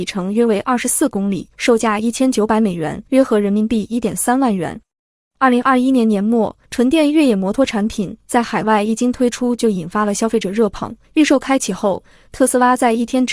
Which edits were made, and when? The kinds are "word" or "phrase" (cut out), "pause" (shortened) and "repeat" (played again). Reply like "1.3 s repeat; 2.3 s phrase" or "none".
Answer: 1.5 s pause; 3.1 s pause; 6.6 s pause; 11.0 s pause